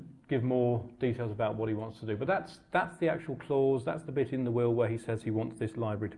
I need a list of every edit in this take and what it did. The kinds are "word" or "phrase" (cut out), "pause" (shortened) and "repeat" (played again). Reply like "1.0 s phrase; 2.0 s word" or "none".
none